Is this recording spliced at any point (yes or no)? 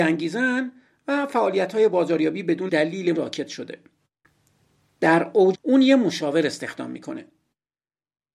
yes